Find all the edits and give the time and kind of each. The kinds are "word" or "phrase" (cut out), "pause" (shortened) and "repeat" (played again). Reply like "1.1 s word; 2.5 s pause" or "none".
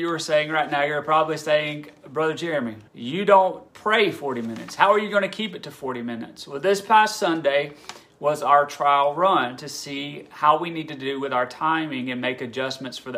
2.9 s pause; 3.7 s pause